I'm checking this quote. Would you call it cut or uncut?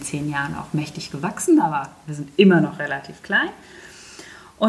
uncut